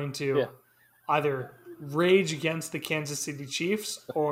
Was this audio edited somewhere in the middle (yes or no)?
no